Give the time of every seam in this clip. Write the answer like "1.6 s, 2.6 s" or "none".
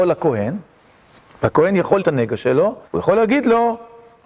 2.0 s, 2.9 s